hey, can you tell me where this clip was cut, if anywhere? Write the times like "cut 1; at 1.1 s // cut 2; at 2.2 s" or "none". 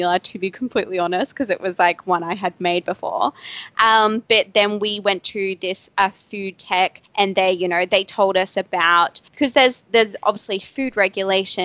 cut 1; at 7.1 s // cut 2; at 9.3 s